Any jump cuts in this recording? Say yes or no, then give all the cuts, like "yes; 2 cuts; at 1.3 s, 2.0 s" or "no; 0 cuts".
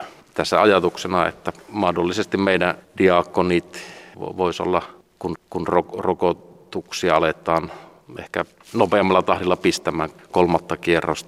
yes; 1 cut; at 5.4 s